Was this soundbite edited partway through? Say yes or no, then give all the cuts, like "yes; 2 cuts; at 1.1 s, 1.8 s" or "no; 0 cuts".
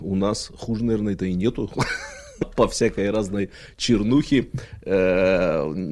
yes; 1 cut; at 2.4 s